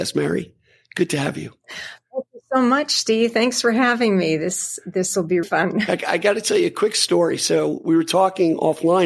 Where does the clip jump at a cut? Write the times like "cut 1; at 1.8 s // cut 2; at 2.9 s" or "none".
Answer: cut 1; at 5.4 s